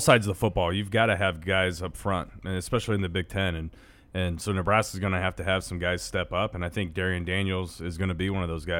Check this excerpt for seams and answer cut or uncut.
uncut